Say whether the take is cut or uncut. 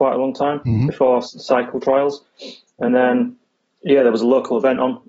uncut